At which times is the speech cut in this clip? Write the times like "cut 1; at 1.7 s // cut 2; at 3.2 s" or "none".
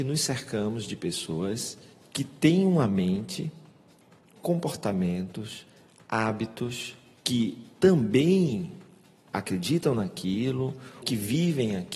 cut 1; at 11.0 s